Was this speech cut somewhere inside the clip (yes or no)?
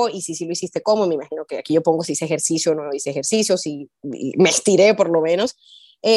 no